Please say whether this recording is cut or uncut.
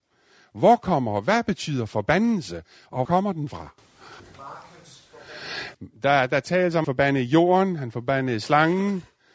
cut